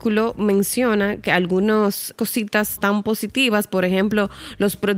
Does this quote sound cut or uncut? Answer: cut